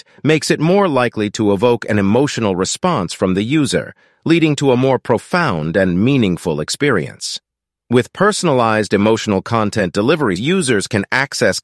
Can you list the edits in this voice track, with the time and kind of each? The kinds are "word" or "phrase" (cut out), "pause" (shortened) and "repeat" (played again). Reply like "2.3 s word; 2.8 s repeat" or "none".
10.4 s word